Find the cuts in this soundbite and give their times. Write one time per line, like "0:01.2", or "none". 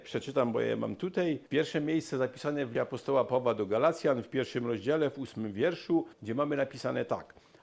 0:01.5
0:02.7
0:06.1

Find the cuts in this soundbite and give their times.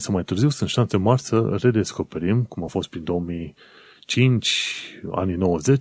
none

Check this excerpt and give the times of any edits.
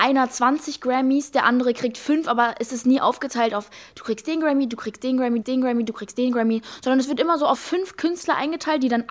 0:05.4
0:07.6

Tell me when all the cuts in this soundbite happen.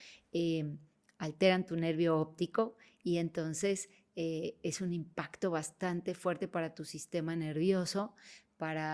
none

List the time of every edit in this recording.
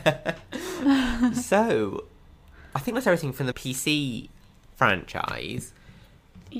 0:03.5

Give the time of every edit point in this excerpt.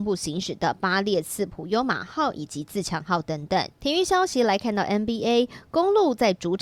0:03.8

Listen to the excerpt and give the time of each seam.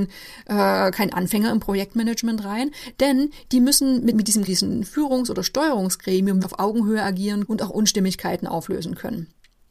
0:04.1
0:04.5
0:06.4
0:07.5

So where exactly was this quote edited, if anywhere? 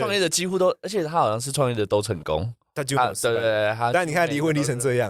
none

